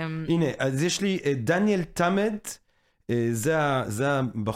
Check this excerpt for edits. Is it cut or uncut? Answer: uncut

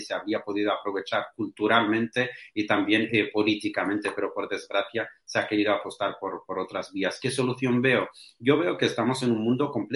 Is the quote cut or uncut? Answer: uncut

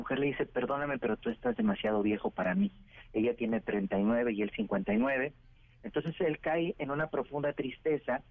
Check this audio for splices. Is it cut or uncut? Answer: uncut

